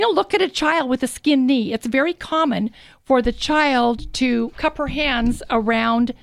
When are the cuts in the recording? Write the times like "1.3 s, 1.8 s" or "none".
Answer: none